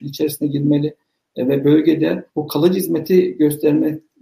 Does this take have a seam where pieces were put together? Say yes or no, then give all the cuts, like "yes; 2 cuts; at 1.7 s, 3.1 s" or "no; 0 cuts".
yes; 1 cut; at 2.3 s